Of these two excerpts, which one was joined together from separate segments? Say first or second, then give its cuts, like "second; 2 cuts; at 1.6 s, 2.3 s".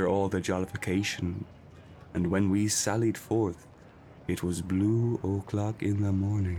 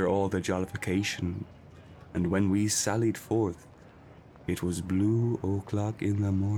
first; 1 cut; at 4.2 s